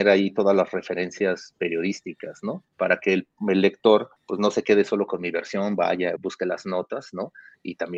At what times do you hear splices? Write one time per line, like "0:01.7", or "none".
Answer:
0:04.2
0:06.2